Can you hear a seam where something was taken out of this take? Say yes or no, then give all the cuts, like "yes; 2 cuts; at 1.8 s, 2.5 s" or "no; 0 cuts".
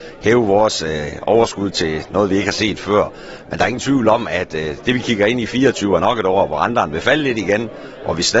no; 0 cuts